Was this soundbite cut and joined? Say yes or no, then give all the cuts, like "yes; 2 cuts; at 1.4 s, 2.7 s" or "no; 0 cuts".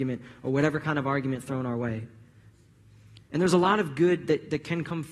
yes; 1 cut; at 3.3 s